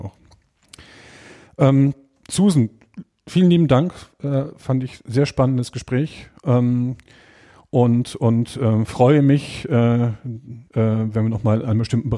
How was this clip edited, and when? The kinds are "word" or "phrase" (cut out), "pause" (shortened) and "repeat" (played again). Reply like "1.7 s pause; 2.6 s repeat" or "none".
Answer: 10.7 s pause